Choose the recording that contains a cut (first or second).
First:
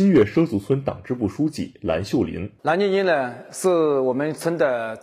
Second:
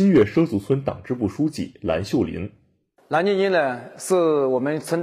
first